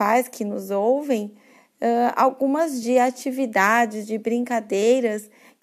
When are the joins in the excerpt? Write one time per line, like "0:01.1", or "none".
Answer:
0:02.8